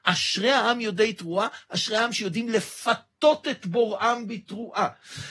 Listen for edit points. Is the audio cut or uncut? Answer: uncut